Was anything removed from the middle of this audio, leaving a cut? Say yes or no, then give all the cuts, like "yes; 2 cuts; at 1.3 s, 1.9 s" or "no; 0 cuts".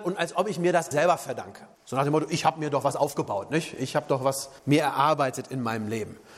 yes; 3 cuts; at 0.9 s, 1.7 s, 4.6 s